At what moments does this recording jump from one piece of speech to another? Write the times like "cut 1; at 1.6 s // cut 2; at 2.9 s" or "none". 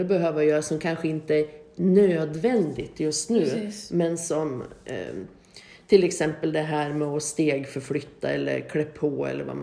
none